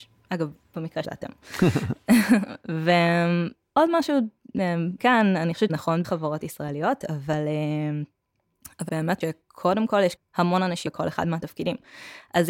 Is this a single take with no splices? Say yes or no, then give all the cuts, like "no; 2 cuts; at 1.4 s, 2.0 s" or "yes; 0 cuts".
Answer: no; 8 cuts; at 1.0 s, 5.0 s, 5.7 s, 6.0 s, 8.9 s, 9.2 s, 10.2 s, 10.9 s